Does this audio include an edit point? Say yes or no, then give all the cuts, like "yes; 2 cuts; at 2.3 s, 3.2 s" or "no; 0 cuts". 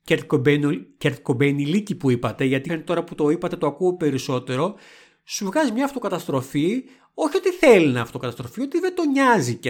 yes; 1 cut; at 2.7 s